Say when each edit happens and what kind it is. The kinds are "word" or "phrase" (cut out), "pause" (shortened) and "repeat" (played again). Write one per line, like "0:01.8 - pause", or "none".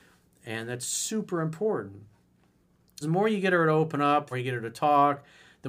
0:03.0 - word
0:04.3 - word